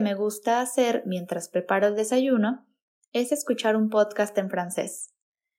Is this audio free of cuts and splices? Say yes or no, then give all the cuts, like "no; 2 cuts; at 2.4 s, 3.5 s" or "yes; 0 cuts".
yes; 0 cuts